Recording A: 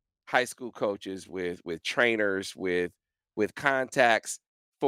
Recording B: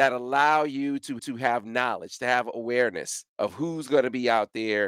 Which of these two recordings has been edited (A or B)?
B